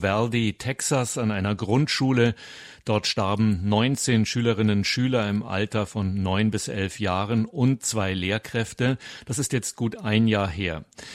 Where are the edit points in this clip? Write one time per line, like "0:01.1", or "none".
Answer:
none